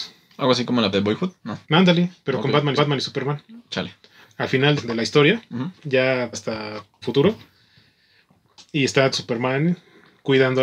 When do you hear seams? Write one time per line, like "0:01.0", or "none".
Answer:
0:00.9
0:01.6
0:02.8
0:04.8
0:06.3
0:07.0
0:09.1